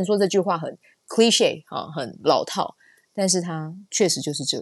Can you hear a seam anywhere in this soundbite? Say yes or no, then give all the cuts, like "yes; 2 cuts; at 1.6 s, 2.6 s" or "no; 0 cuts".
no; 0 cuts